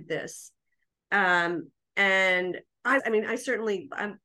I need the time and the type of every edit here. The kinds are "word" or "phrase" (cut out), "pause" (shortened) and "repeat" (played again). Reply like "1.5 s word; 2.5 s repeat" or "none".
3.0 s phrase